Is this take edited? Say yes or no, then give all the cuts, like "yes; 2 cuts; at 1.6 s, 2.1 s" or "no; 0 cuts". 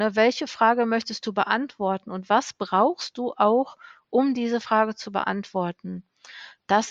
no; 0 cuts